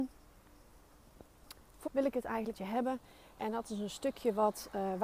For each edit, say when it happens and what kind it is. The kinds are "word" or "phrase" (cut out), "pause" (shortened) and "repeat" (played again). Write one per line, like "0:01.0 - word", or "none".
0:01.9 - word
0:02.5 - word